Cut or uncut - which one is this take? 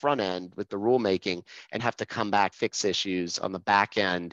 cut